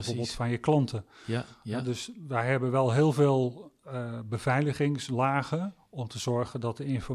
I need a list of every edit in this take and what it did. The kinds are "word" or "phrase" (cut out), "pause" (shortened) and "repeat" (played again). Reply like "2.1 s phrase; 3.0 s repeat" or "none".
none

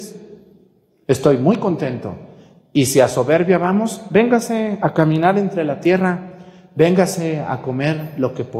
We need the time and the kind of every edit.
none

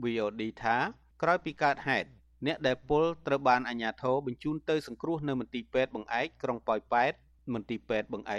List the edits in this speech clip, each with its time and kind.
none

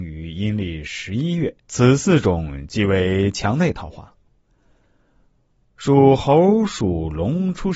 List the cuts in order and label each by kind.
1.6 s pause

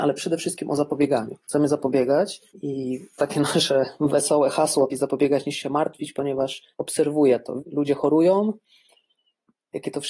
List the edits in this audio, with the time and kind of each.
2.5 s pause; 4.9 s word; 6.7 s pause; 7.6 s phrase

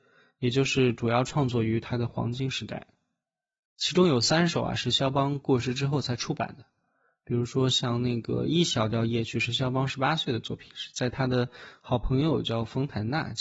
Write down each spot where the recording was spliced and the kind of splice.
none

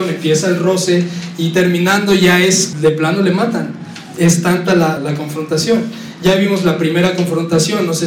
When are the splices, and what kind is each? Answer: 2.7 s word; 5.0 s word

